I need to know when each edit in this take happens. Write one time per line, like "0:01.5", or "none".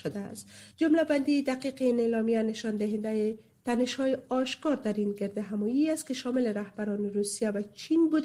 none